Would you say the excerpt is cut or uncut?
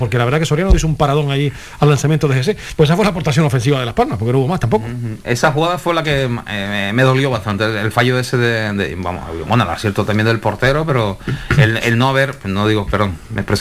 uncut